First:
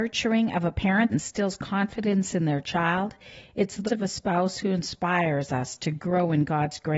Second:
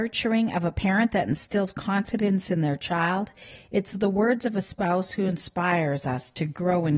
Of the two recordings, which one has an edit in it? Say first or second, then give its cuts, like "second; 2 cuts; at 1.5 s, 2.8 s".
first; 2 cuts; at 1.1 s, 3.9 s